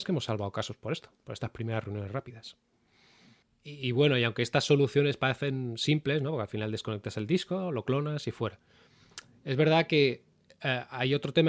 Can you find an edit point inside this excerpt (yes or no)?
no